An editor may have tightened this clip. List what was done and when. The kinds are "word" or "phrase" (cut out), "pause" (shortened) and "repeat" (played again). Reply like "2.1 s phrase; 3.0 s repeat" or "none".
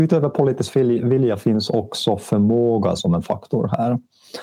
3.0 s word